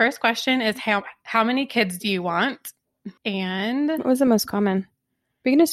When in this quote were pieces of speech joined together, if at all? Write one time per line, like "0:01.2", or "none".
0:03.2